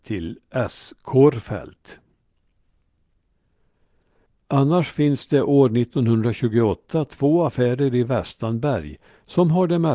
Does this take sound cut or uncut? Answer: uncut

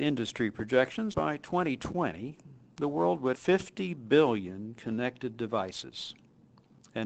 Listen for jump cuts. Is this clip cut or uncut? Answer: cut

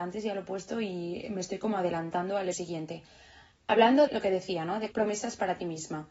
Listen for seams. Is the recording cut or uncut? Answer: cut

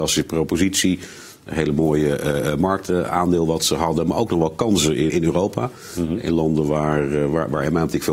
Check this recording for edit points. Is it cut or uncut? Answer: cut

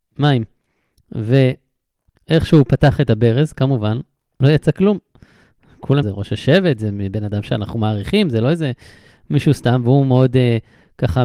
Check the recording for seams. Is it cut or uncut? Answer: cut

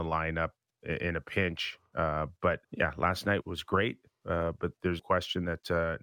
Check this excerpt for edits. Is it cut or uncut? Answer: cut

